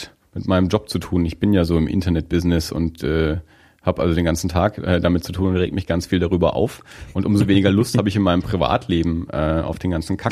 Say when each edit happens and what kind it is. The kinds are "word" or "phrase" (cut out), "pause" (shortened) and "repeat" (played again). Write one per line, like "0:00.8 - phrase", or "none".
none

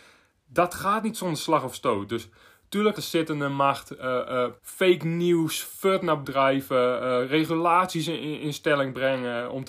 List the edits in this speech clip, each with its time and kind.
0:03.0 - word
0:04.6 - pause
0:06.2 - word

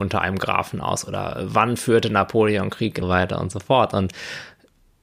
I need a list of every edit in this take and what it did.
0:03.0 - phrase

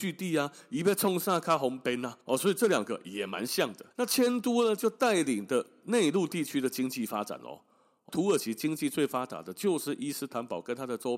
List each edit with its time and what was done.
0:02.2 - pause
0:03.9 - pause
0:08.1 - phrase

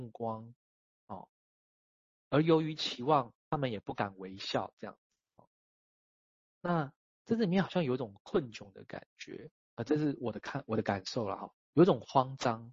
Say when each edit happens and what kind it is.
0:03.4 - pause
0:09.6 - word
0:11.6 - pause

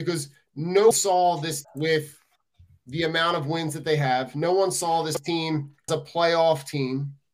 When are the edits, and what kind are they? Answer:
0:00.9 - word
0:01.6 - word
0:05.9 - word

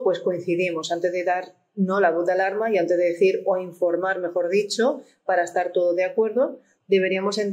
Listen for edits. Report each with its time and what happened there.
none

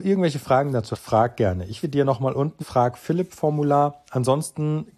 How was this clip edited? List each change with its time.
0:00.9 - word
0:01.8 - word
0:02.6 - word

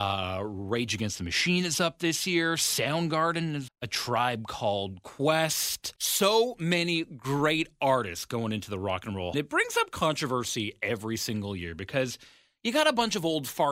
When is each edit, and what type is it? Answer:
0:03.7 - word
0:06.0 - pause
0:09.3 - phrase

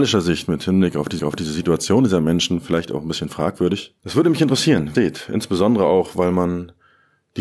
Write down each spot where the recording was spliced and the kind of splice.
0:01.2 - repeat
0:04.0 - pause
0:04.9 - phrase

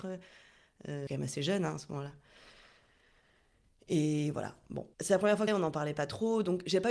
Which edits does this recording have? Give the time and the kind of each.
0:01.1 - phrase
0:04.9 - pause
0:05.5 - phrase

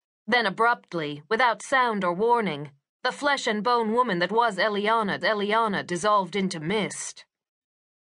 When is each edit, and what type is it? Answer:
0:05.2 - repeat

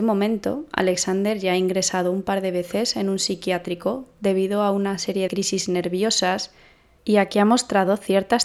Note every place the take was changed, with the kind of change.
0:05.3 - word

